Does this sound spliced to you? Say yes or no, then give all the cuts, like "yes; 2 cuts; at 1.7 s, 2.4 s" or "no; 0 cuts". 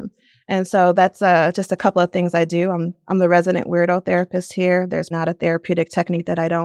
yes; 1 cut; at 5.1 s